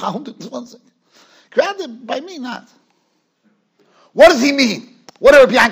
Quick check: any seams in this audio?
no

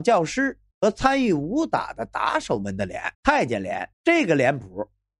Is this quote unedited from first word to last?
no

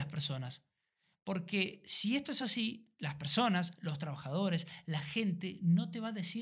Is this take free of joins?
yes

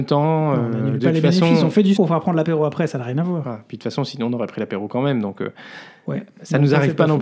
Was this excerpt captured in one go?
no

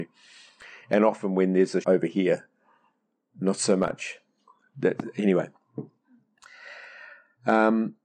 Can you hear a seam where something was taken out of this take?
yes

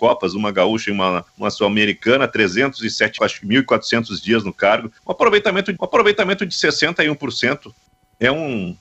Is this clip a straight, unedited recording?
no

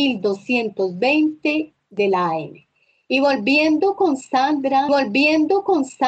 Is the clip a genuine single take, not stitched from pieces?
no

